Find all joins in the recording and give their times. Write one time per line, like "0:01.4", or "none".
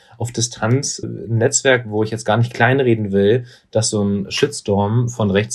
0:01.0

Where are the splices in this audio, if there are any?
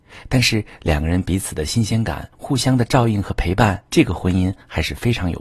0:02.3
0:03.9

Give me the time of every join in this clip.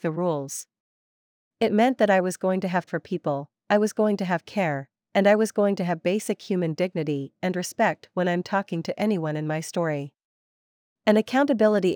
0:02.9

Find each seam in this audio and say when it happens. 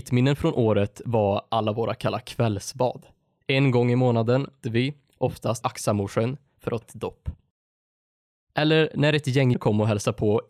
0:04.6
0:05.6
0:06.8
0:09.5

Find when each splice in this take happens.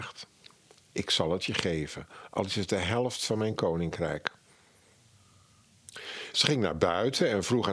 none

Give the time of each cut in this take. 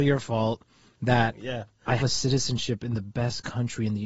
0:02.0

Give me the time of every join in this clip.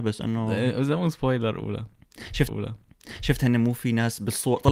0:02.5

